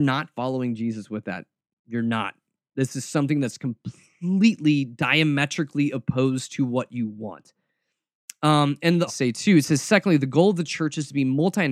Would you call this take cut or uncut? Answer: cut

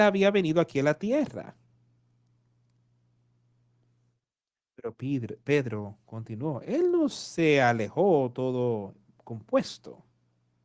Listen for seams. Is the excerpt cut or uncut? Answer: uncut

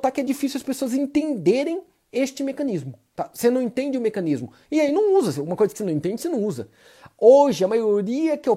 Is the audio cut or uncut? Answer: uncut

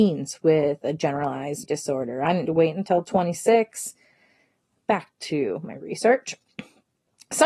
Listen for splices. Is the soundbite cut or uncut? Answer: cut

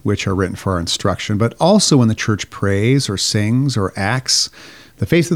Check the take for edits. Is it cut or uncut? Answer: uncut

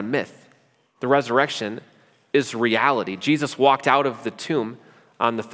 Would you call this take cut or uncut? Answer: uncut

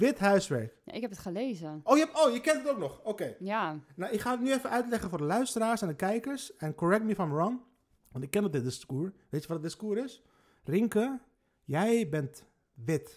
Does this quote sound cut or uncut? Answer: uncut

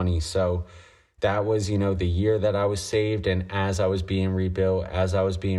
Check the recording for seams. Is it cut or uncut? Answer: uncut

